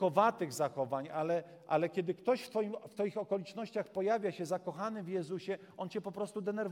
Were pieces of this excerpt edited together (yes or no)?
no